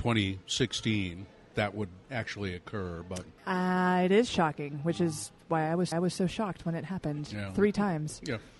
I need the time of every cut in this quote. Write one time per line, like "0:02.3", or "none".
0:01.5
0:02.0
0:03.4
0:05.9